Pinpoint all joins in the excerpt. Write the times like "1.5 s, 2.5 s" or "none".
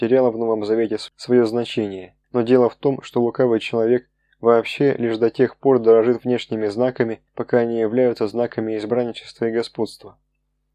1.1 s, 2.2 s, 7.3 s